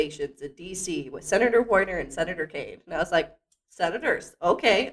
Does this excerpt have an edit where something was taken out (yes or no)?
no